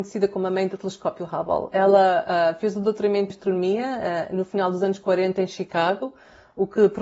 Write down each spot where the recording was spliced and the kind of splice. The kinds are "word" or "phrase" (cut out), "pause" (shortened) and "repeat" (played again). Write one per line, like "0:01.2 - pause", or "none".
0:03.3 - word